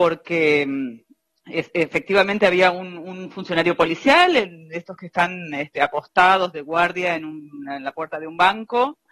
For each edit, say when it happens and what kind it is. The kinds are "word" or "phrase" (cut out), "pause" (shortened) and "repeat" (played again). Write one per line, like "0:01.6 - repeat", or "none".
0:01.3 - pause